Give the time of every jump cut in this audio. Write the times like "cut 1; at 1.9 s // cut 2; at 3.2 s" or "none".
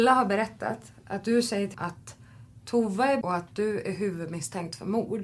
cut 1; at 1.7 s // cut 2; at 3.2 s